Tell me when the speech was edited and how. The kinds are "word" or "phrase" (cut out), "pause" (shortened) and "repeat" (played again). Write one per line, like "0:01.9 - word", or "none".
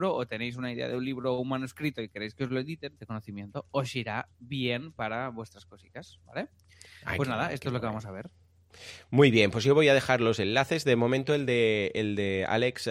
0:03.0 - word